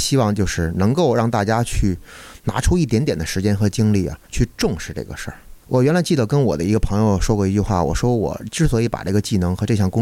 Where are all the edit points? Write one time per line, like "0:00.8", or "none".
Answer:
0:04.2
0:05.6